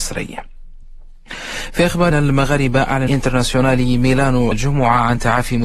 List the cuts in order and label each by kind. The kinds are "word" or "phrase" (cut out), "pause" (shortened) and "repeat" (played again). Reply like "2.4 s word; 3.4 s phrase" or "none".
2.1 s word; 3.1 s word; 4.5 s word